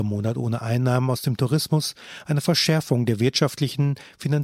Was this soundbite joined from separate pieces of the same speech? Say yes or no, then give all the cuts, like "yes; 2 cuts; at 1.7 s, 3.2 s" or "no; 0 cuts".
no; 0 cuts